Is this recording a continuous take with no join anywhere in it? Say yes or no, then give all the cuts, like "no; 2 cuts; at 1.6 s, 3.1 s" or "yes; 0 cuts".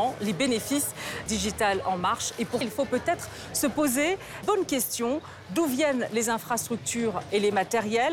no; 3 cuts; at 1.3 s, 2.6 s, 4.4 s